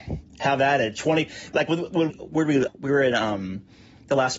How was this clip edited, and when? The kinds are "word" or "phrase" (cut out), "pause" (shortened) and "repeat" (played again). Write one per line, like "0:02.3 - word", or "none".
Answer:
0:02.1 - word
0:02.7 - word